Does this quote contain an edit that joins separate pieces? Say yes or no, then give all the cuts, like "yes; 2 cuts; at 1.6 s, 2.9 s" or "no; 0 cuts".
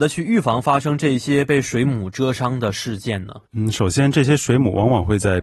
yes; 1 cut; at 3.5 s